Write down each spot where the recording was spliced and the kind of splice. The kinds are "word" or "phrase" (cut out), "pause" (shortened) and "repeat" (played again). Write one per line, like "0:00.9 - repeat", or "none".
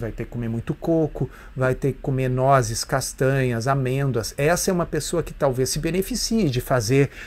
none